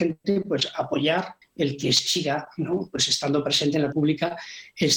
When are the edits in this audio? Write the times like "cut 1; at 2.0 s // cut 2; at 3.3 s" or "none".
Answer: cut 1; at 1.4 s // cut 2; at 3.9 s